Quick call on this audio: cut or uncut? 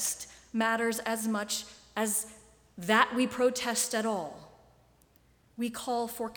uncut